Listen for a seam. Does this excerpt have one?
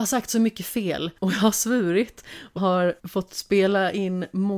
yes; 3 cuts; at 1.2 s, 2.6 s, 3.0 s

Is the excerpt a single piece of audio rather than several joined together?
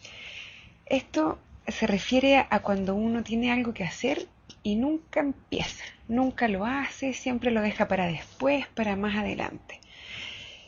no; 1 cut; at 1.6 s

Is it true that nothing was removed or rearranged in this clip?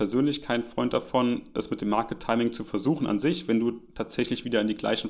yes; 0 cuts

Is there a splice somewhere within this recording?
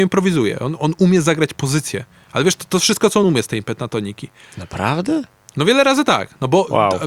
no; 0 cuts

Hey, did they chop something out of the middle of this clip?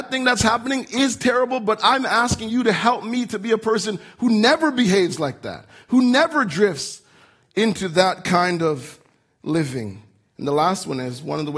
no; 0 cuts

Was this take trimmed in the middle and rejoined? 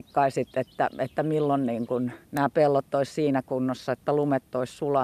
yes; 1 cut; at 2.2 s

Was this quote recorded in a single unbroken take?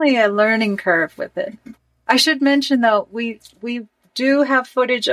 yes; 0 cuts

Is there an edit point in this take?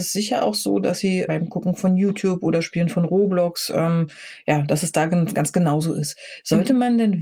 yes; 1 cut; at 1.3 s

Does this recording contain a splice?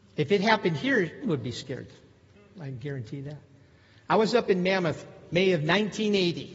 yes; 2 cuts; at 1.2 s, 5.3 s

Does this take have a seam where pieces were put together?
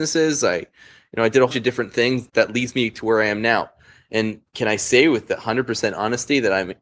yes; 2 cuts; at 1.5 s, 2.3 s

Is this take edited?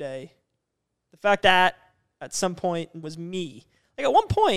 yes; 2 cuts; at 1.4 s, 3.0 s

